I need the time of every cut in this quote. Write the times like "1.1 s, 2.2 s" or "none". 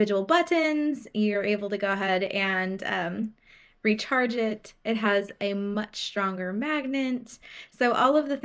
none